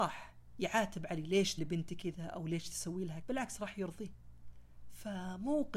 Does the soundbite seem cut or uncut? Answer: cut